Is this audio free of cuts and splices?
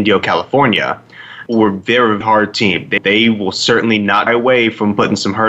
no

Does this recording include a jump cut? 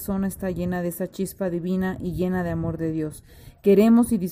no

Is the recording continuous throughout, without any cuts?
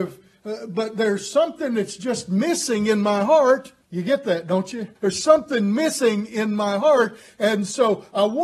no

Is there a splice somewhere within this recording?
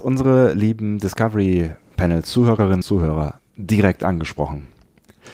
yes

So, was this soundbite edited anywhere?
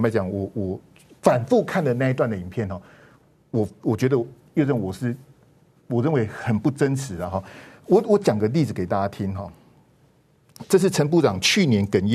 no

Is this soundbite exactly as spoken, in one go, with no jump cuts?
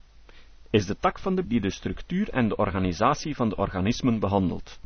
no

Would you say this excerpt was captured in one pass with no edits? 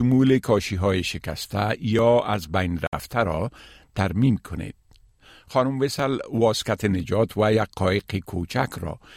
yes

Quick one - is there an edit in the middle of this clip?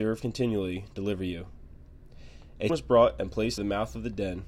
yes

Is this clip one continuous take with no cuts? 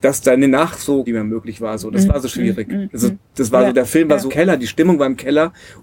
no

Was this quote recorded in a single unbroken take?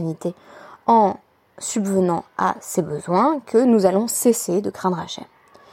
yes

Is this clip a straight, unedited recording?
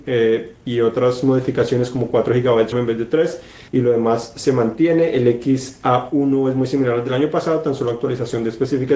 no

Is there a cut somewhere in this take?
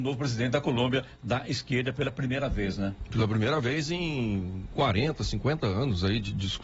no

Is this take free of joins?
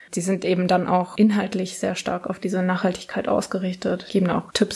yes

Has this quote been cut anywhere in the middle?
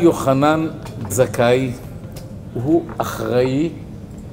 yes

